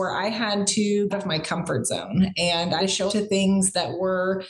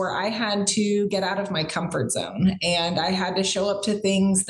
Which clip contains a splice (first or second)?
first